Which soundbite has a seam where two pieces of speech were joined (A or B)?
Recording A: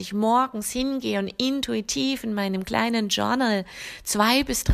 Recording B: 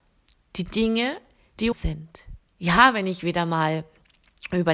B